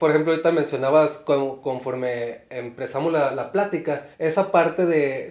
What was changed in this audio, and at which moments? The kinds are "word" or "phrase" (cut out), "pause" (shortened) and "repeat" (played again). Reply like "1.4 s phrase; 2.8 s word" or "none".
4.1 s pause